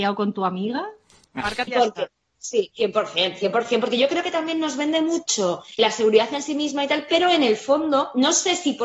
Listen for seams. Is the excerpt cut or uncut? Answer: cut